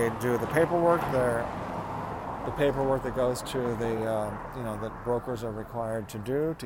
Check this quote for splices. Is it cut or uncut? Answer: uncut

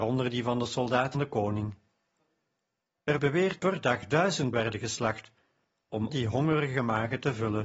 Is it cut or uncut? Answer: cut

